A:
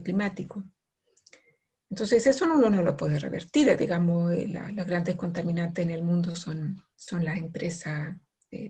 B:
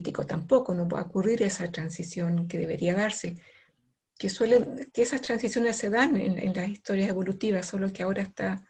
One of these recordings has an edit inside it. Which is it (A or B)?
A